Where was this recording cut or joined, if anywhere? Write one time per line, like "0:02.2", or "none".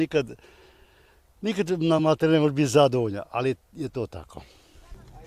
none